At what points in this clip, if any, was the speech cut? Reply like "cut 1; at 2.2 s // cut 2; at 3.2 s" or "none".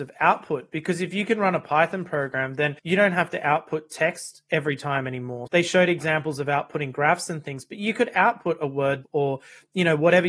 cut 1; at 2.8 s // cut 2; at 5.5 s // cut 3; at 9.0 s